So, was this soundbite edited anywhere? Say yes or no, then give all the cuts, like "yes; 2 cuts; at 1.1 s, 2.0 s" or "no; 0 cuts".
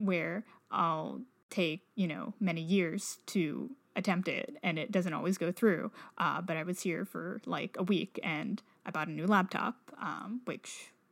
no; 0 cuts